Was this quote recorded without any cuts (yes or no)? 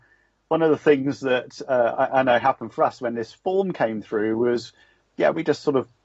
yes